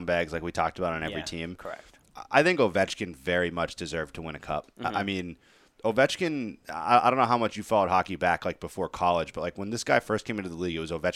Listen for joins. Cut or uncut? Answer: uncut